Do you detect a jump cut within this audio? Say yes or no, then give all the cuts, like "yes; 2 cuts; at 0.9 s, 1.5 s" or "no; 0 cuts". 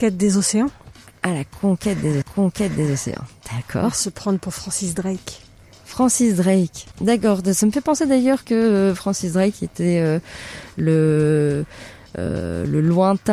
yes; 2 cuts; at 2.2 s, 6.9 s